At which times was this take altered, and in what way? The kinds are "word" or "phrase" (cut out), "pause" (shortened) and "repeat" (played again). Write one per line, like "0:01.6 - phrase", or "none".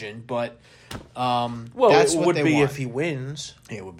none